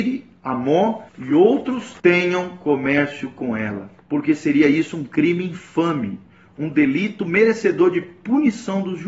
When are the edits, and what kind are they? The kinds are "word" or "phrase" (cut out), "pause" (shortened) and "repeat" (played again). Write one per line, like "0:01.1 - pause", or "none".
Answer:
0:01.1 - pause
0:02.0 - pause
0:04.0 - pause